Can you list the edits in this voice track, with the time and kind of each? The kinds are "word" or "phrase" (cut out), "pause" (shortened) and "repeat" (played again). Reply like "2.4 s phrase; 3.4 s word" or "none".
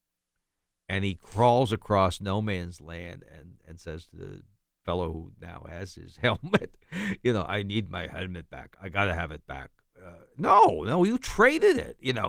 none